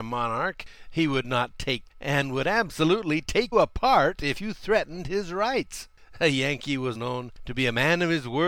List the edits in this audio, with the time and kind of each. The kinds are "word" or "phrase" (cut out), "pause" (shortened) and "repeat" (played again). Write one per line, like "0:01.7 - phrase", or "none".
0:01.9 - word
0:03.5 - word
0:06.9 - word

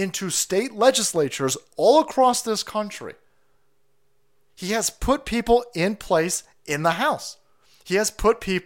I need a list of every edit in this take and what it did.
none

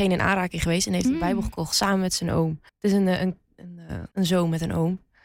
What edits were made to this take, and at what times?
0:02.7 - pause
0:04.1 - pause

